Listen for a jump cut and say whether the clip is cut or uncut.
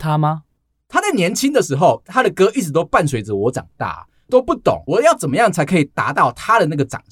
uncut